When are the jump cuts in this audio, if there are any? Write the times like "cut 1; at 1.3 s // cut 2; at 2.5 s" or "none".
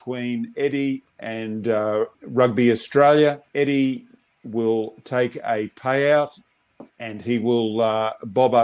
cut 1; at 2.1 s // cut 2; at 3.5 s // cut 3; at 6.9 s